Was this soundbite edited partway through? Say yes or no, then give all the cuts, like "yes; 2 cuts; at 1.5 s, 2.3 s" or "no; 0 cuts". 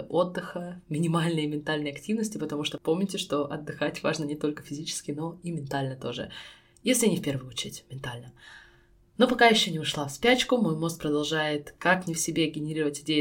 no; 0 cuts